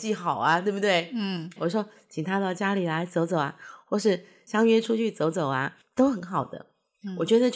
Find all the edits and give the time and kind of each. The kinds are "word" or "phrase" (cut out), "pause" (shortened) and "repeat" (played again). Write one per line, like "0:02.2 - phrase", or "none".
0:01.6 - word